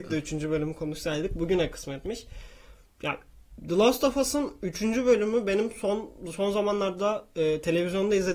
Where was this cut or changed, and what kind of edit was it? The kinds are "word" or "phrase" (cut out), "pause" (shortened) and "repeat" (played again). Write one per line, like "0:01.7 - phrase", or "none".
none